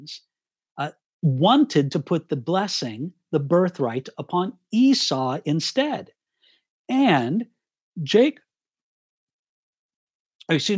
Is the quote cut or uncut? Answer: uncut